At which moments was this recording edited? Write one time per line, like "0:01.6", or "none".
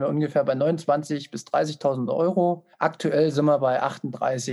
0:02.7